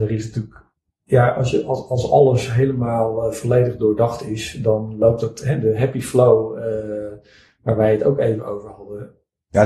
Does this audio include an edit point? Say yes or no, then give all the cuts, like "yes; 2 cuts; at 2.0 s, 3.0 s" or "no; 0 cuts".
no; 0 cuts